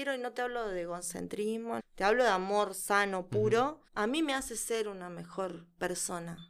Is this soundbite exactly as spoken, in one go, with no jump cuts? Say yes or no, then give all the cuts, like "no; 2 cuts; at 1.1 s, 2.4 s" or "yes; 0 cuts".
no; 2 cuts; at 1.8 s, 3.9 s